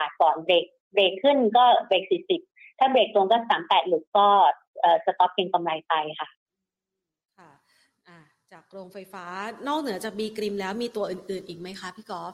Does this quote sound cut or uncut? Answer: uncut